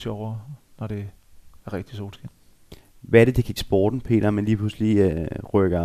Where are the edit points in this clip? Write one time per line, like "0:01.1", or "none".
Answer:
0:01.6
0:03.6